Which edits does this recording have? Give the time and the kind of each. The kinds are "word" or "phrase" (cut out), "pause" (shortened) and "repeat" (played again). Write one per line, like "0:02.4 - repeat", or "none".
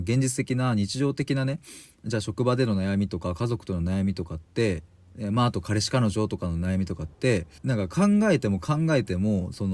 0:07.6 - pause